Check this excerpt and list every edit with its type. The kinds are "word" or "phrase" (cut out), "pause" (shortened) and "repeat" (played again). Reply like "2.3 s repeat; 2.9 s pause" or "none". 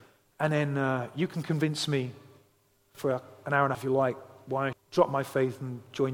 3.7 s word; 4.7 s word